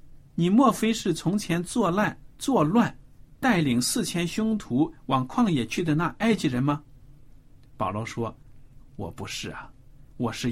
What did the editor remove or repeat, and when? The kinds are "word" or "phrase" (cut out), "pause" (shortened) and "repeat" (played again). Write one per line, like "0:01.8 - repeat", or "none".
0:02.3 - pause